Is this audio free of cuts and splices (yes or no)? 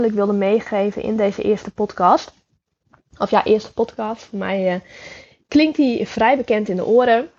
yes